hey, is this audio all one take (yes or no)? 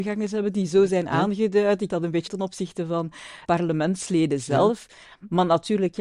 no